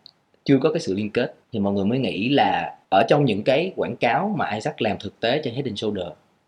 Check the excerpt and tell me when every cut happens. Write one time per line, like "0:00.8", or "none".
0:01.4
0:02.8